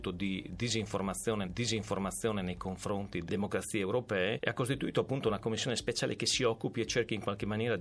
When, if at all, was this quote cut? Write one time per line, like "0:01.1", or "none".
0:01.4
0:03.3